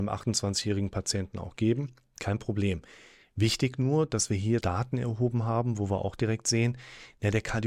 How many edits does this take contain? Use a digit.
1